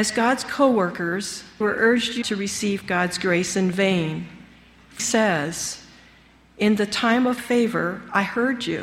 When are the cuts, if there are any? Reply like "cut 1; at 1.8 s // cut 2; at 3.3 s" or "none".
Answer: cut 1; at 1.6 s // cut 2; at 2.2 s // cut 3; at 5.0 s // cut 4; at 7.4 s